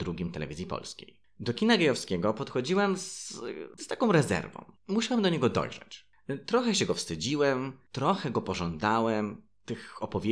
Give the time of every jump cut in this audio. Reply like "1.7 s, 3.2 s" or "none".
none